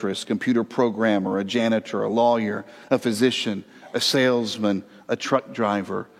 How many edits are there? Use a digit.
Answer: 0